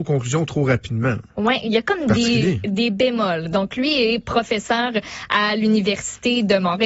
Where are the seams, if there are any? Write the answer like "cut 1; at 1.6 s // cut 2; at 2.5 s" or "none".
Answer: none